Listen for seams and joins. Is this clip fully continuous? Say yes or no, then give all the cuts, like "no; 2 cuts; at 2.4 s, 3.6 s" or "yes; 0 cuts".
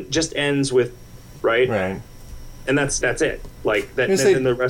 no; 2 cuts; at 1.4 s, 3.0 s